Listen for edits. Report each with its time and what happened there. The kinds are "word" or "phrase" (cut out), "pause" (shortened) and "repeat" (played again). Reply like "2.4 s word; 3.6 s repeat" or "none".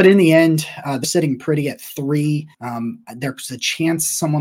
1.0 s phrase; 2.5 s pause